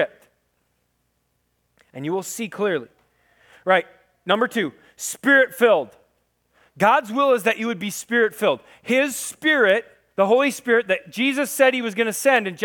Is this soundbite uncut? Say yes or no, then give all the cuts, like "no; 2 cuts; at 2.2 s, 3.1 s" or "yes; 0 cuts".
yes; 0 cuts